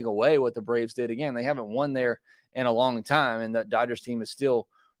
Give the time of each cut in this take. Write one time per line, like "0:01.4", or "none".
none